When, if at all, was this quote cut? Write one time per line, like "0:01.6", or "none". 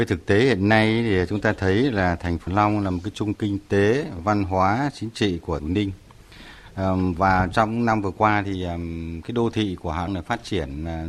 0:02.5
0:03.3
0:05.6
0:10.1

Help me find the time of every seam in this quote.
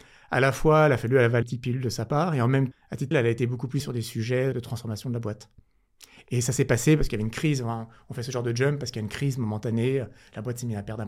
0:01.4
0:02.7
0:03.1
0:03.8
0:04.5

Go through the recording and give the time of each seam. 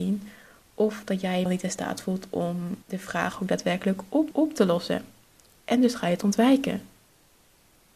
0:01.5
0:02.8
0:04.3

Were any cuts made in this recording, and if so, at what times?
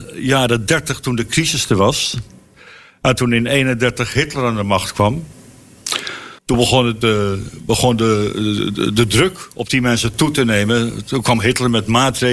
0:06.4

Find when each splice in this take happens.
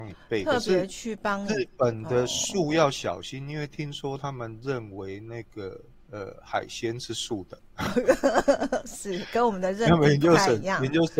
0:06.0

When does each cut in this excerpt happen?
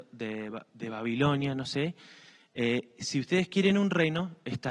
none

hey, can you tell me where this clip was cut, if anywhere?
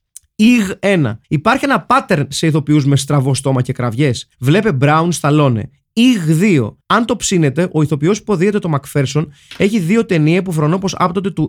0:01.2
0:04.3
0:06.8

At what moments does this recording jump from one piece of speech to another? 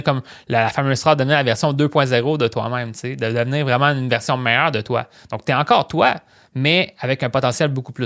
none

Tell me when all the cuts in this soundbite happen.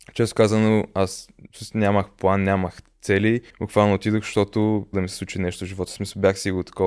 0:03.5
0:04.9

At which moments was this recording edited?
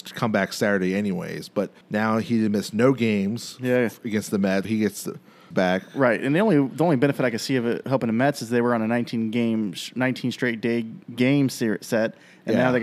0:01.8
0:04.6
0:05.5
0:11.0

